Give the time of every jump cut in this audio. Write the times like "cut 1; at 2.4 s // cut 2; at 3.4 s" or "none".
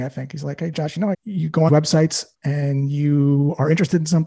cut 1; at 1.1 s // cut 2; at 1.7 s // cut 3; at 2.3 s